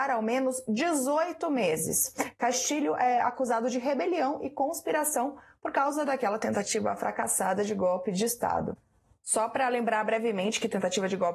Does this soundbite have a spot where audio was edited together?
no; 0 cuts

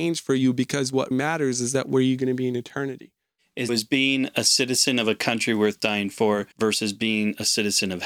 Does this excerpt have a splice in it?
yes; 3 cuts; at 1.1 s, 3.7 s, 6.5 s

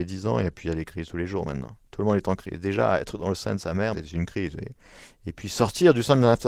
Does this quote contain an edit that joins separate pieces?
yes; 1 cut; at 3.9 s

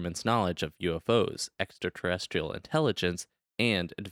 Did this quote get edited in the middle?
no; 0 cuts

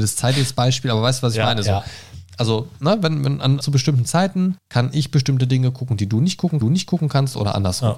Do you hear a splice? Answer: yes; 3 cuts; at 3.6 s, 4.6 s, 6.6 s

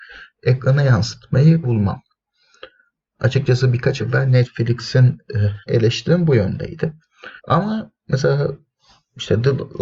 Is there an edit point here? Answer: yes; 4 cuts; at 1.6 s, 4.0 s, 5.7 s, 7.4 s

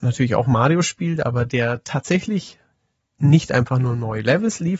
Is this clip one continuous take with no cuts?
yes; 0 cuts

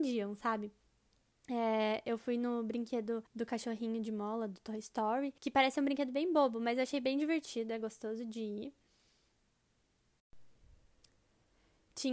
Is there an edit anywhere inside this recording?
yes; 2 cuts; at 3.3 s, 5.4 s

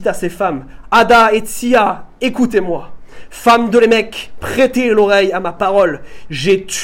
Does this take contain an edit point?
no; 0 cuts

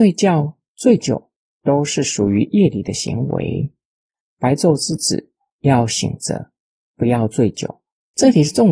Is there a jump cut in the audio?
no; 0 cuts

